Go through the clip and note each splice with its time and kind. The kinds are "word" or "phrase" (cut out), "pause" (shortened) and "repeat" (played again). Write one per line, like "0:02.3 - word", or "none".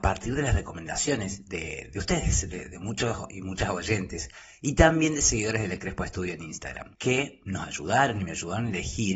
none